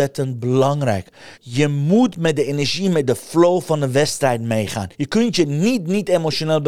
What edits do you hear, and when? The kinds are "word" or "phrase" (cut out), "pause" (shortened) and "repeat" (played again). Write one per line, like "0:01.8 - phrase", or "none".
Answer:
0:01.3 - pause
0:04.9 - pause